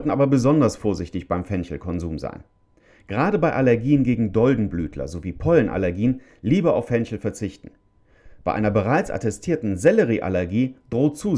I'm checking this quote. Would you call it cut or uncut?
uncut